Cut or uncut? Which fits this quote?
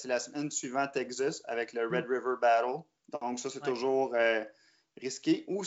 uncut